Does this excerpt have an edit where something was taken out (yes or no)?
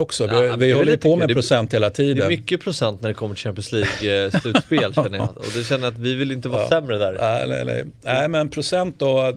no